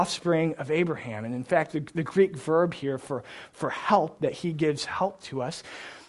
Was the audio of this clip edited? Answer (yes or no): no